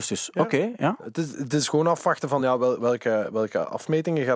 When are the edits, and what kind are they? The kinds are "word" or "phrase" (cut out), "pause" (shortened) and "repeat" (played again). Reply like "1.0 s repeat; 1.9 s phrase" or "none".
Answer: none